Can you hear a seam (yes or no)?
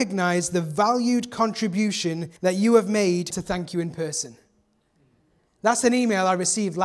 yes